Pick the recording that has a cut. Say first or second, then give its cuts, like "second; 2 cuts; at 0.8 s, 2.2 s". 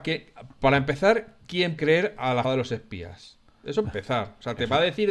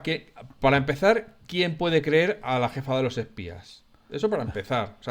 first; 3 cuts; at 1.8 s, 2.4 s, 3.8 s